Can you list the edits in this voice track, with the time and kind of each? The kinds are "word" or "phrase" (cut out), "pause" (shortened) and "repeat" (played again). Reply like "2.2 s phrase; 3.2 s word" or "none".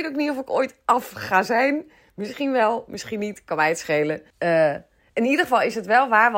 4.3 s pause